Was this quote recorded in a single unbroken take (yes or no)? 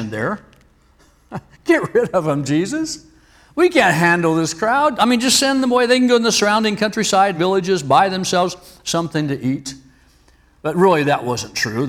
yes